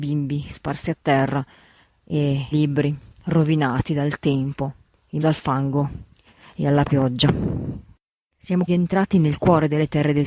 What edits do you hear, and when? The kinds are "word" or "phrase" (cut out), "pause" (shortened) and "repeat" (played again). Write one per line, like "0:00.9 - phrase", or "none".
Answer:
0:02.5 - word
0:05.2 - word
0:08.7 - word